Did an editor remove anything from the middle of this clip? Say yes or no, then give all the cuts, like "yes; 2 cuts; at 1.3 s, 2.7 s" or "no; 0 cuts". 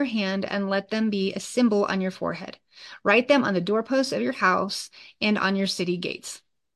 no; 0 cuts